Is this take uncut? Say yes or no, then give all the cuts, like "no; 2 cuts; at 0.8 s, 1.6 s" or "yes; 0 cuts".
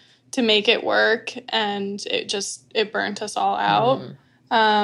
yes; 0 cuts